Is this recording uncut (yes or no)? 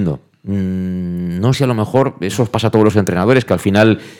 no